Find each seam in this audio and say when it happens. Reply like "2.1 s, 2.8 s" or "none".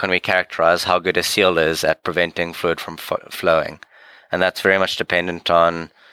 none